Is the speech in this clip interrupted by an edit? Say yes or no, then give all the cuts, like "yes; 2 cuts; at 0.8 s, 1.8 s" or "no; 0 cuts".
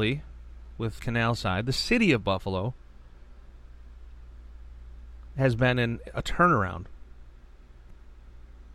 yes; 1 cut; at 1.0 s